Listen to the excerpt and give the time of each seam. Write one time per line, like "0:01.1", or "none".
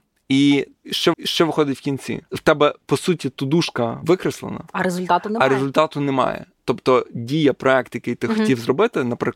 0:01.1
0:02.3